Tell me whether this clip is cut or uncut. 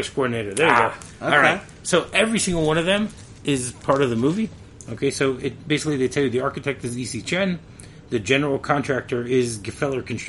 cut